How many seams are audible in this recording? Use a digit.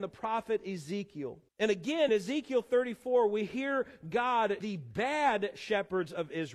3